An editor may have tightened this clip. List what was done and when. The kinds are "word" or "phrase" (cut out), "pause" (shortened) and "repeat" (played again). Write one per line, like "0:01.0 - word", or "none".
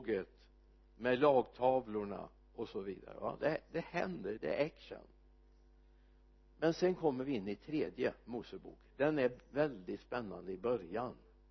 0:04.4 - word